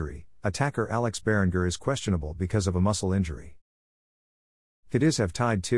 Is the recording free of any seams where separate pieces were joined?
yes; 0 cuts

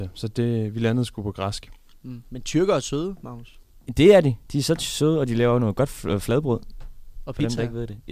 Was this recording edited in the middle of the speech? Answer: no; 0 cuts

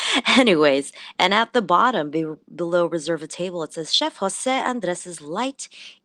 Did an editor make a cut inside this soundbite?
no; 0 cuts

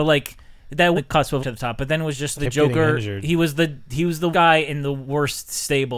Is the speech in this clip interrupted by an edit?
yes; 4 cuts; at 0.9 s, 1.4 s, 2.3 s, 4.3 s

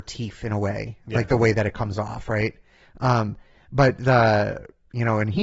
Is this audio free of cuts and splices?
yes; 0 cuts

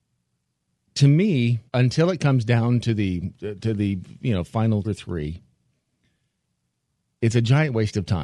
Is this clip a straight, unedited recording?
no; 2 cuts; at 1.7 s, 4.8 s

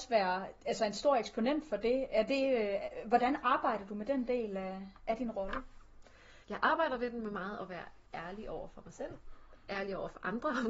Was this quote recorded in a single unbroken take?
no; 2 cuts; at 6.4 s, 8.1 s

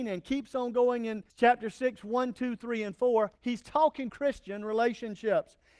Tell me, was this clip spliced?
yes; 3 cuts; at 1.3 s, 3.4 s, 4.1 s

